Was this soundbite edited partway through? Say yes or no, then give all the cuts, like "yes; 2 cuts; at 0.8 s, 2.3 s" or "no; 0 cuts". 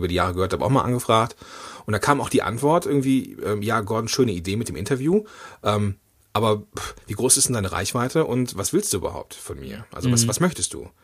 no; 0 cuts